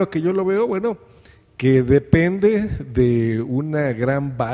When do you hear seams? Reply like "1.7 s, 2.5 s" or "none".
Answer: none